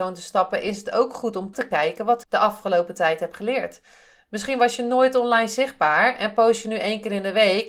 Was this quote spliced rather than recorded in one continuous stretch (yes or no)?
yes